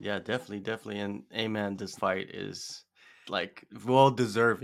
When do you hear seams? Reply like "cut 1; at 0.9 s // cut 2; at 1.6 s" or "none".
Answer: cut 1; at 2.0 s // cut 2; at 3.2 s